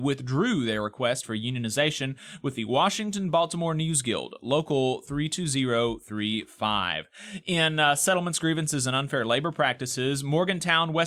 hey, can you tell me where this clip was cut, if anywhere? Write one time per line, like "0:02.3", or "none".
none